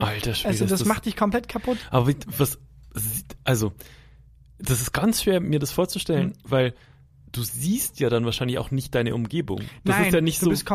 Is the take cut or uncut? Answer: uncut